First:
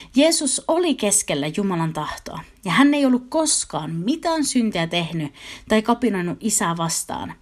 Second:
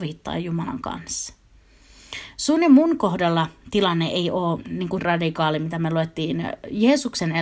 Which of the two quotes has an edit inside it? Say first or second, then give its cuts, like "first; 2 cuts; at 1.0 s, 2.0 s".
second; 1 cut; at 5.0 s